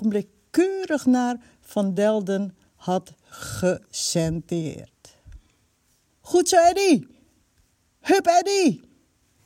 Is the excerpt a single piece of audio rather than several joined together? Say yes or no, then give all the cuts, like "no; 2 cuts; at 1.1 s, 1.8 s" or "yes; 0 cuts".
yes; 0 cuts